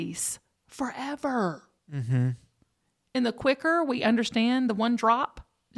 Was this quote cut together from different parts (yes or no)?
yes